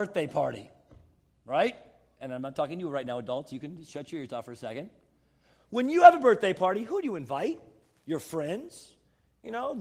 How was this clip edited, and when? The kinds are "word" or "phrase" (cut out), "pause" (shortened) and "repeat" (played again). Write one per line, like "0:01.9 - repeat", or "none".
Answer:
none